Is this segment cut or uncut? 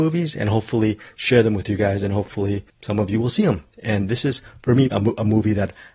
cut